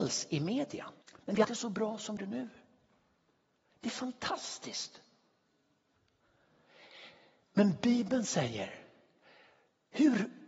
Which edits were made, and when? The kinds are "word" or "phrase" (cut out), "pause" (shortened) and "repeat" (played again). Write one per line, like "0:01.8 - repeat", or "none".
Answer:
0:01.0 - pause
0:01.4 - phrase
0:02.2 - word